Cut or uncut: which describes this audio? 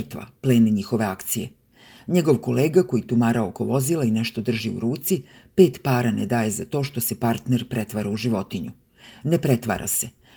uncut